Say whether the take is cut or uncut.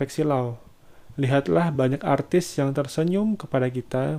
uncut